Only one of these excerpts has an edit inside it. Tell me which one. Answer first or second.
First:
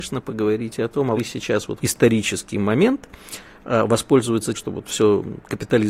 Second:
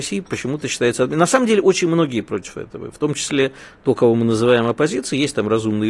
first